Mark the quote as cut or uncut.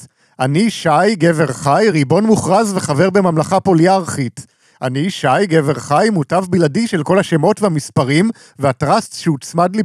uncut